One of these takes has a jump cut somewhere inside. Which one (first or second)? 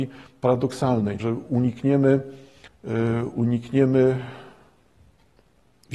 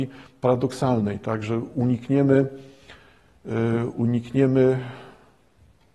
first